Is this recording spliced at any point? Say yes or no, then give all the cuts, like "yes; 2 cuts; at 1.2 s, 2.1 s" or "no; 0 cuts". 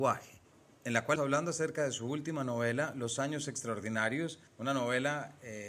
yes; 2 cuts; at 1.2 s, 4.5 s